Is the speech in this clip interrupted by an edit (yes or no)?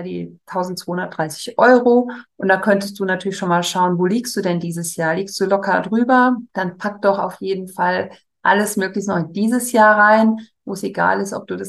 yes